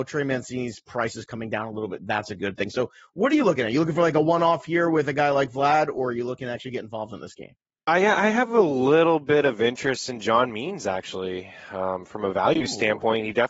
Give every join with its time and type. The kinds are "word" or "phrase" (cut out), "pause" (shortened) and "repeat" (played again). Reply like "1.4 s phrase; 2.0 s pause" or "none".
none